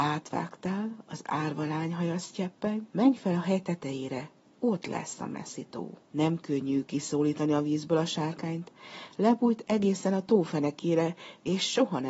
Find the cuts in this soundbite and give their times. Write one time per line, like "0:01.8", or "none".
0:02.9
0:04.4
0:06.0